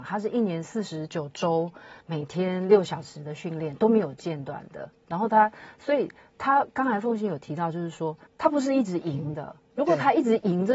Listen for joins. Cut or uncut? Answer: cut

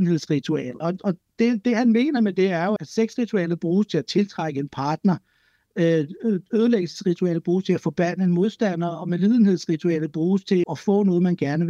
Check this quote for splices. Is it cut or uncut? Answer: cut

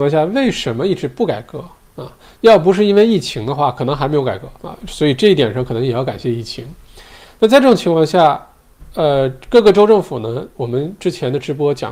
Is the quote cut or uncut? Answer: cut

